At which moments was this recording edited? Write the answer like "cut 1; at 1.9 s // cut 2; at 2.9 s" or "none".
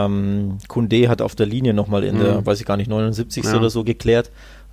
none